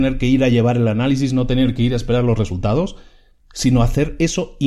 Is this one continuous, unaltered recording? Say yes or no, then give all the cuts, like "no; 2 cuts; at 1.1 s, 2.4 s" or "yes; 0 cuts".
yes; 0 cuts